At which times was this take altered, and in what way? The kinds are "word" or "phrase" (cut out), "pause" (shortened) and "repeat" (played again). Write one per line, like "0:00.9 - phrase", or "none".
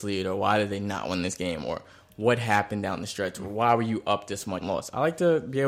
0:04.6 - word